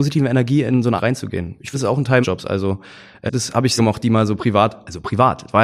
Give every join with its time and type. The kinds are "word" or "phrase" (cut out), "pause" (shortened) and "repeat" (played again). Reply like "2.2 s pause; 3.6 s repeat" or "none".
1.0 s word; 1.7 s word; 2.2 s word; 3.3 s word; 3.8 s word